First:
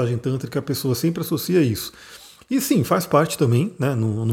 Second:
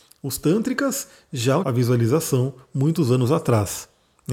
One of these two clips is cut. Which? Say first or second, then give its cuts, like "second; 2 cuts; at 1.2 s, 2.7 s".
second; 1 cut; at 1.6 s